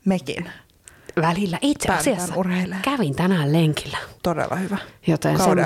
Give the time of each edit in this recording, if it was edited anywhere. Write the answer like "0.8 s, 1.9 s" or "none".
4.2 s

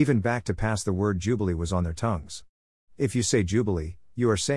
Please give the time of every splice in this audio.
none

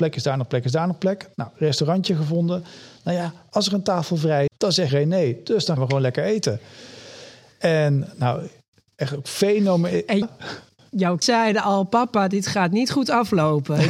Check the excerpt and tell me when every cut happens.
4.5 s, 4.9 s, 5.8 s, 10.2 s, 11.2 s

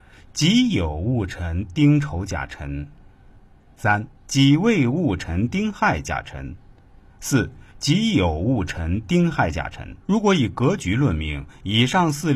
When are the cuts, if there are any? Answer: 4.1 s, 7.7 s, 10.0 s

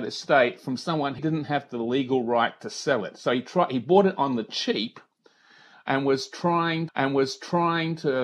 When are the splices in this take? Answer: 1.2 s, 6.9 s

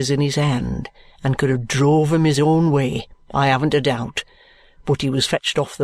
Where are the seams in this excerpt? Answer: none

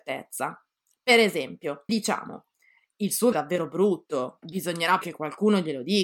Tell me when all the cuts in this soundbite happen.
1.9 s, 3.3 s, 4.4 s, 5.0 s

